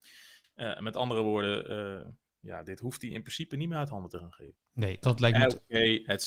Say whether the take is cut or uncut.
cut